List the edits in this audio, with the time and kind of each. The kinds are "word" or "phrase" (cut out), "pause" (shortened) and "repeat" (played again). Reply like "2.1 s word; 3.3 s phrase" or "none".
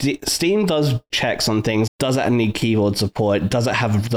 1.1 s word; 1.9 s word